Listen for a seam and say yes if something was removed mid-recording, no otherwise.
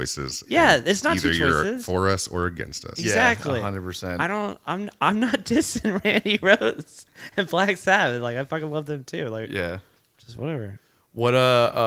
no